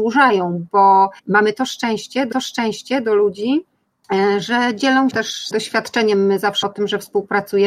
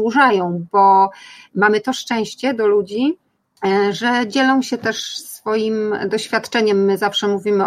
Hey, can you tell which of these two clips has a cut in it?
first; 5 cuts; at 1.2 s, 2.3 s, 5.1 s, 5.5 s, 6.6 s

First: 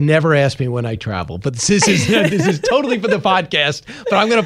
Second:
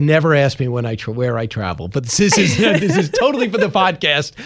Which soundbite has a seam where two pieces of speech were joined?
first; 1 cut; at 1.0 s

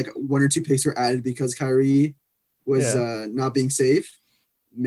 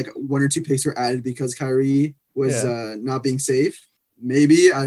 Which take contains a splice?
second; 2 cuts; at 2.2 s, 4.0 s

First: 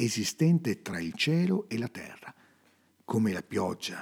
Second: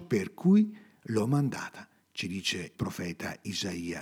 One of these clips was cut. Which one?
second; 1 cut; at 2.8 s

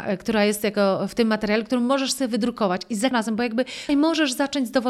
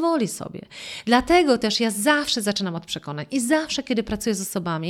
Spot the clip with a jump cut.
first; 2 cuts; at 3.1 s, 3.9 s

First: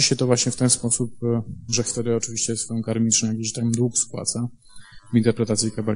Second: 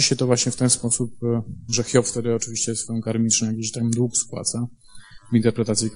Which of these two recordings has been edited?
first; 1 cut; at 1.8 s

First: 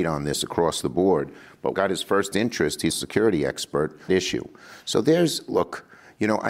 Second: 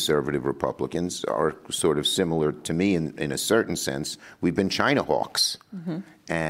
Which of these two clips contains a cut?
first; 3 cuts; at 1.7 s, 2.9 s, 4.1 s

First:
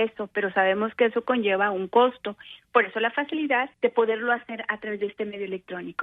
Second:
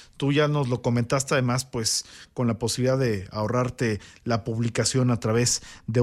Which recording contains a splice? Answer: first; 1 cut; at 3.7 s

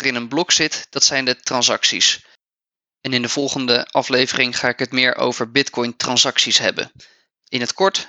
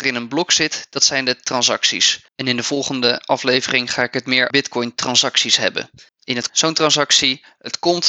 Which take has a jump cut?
second; 4 cuts; at 2.3 s, 4.5 s, 6.1 s, 6.5 s

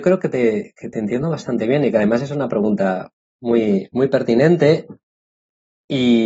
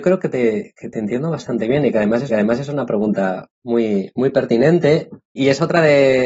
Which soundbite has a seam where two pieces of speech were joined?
second; 3 cuts; at 2.3 s, 3.5 s, 5.4 s

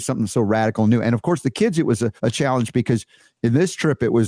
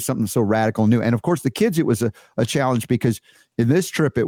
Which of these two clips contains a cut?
first; 1 cut; at 2.2 s

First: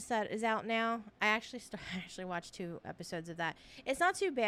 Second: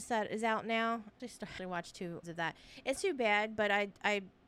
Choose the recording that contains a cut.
second; 4 cuts; at 1.2 s, 1.6 s, 2.2 s, 3.0 s

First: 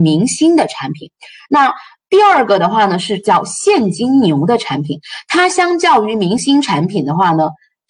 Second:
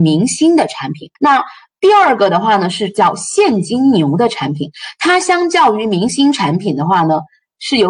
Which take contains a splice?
second; 1 cut; at 1.2 s

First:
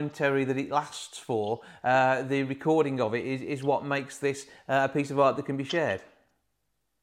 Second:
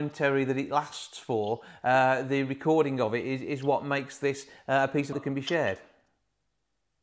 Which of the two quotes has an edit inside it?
second; 1 cut; at 5.1 s

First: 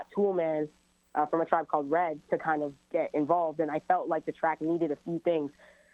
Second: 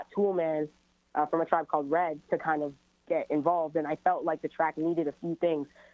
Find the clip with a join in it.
first; 1 cut; at 2.8 s

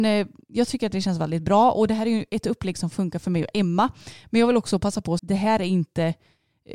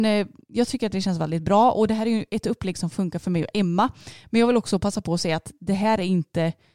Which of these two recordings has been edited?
first; 1 cut; at 5.2 s

